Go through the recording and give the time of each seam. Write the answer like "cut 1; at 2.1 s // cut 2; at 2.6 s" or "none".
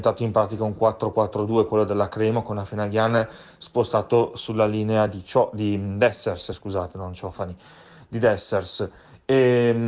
none